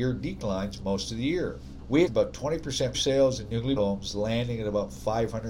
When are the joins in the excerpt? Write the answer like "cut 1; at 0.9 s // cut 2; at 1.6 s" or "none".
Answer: cut 1; at 2.1 s // cut 2; at 2.9 s // cut 3; at 3.8 s